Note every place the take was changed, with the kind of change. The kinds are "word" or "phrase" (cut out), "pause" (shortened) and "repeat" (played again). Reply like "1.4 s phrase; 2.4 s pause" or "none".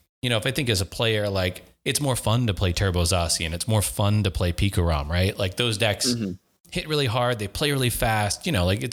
none